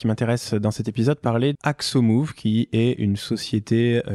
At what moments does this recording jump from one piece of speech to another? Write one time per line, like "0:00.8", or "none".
0:01.5